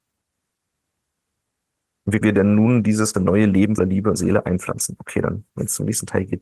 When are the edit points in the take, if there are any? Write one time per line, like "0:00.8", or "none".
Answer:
0:02.2
0:03.1
0:03.8
0:04.2